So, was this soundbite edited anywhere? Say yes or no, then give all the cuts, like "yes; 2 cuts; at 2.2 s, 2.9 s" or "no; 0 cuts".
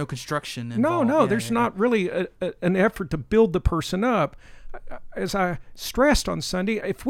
no; 0 cuts